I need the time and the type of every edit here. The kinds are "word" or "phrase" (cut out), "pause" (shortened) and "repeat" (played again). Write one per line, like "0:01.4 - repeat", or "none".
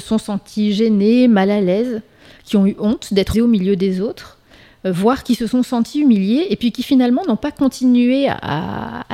0:03.3 - word